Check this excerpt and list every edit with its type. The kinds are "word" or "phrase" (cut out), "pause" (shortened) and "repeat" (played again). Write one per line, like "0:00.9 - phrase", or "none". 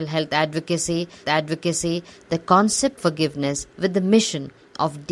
0:01.2 - repeat
0:03.0 - word
0:03.7 - word